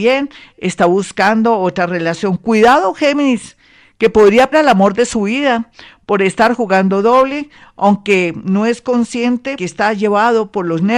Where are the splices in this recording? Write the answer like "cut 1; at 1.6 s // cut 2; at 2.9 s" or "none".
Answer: cut 1; at 4.5 s // cut 2; at 9.6 s

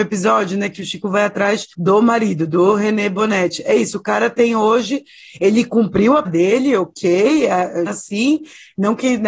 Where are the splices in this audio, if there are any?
cut 1; at 1.7 s // cut 2; at 6.2 s // cut 3; at 7.9 s

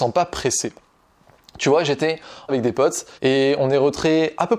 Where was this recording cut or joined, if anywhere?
cut 1; at 2.5 s // cut 2; at 3.2 s

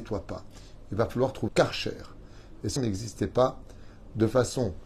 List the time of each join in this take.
cut 1; at 1.5 s // cut 2; at 2.8 s

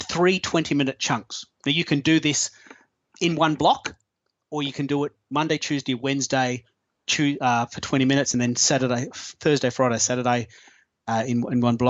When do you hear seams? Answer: none

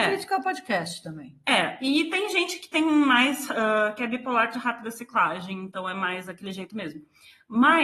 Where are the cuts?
none

